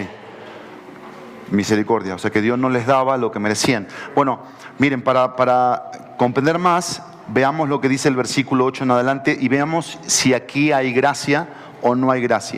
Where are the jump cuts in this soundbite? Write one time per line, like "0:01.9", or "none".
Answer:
none

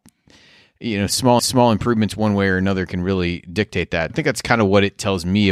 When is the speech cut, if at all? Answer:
0:01.4
0:04.1

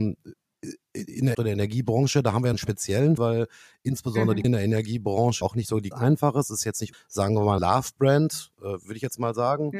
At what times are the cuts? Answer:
0:01.3
0:02.5
0:03.2
0:04.4
0:05.4
0:05.9
0:06.9
0:07.6

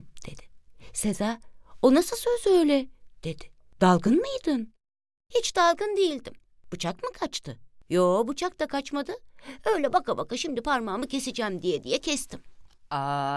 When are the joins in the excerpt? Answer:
none

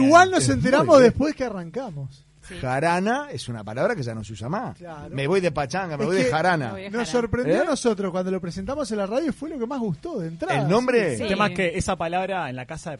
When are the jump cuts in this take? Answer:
none

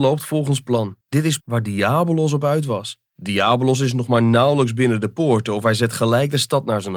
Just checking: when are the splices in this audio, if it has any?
0:01.0
0:01.4
0:03.1

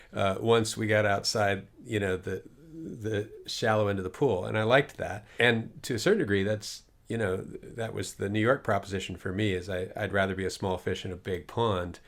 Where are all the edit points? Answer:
none

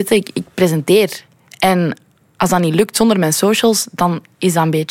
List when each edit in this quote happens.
none

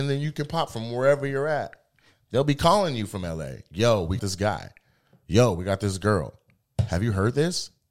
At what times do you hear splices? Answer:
0:04.2

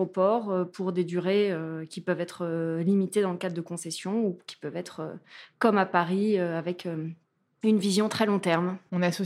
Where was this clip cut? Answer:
none

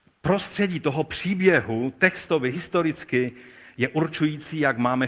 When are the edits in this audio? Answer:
none

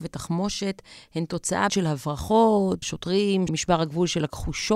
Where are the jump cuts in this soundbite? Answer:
0:01.7
0:02.8
0:03.5

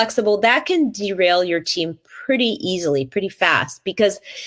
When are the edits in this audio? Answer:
none

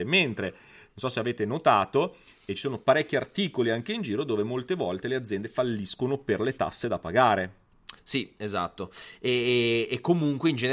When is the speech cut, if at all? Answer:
0:08.0

